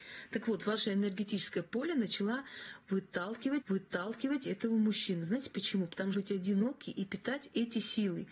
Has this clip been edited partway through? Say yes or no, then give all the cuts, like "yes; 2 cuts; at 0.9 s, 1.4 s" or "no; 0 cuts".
yes; 2 cuts; at 3.6 s, 6.1 s